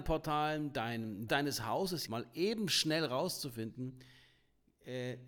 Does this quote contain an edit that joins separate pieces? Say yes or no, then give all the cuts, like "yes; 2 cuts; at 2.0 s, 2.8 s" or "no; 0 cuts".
yes; 2 cuts; at 1.3 s, 2.1 s